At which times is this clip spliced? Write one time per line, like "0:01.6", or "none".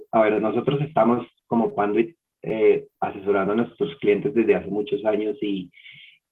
0:02.9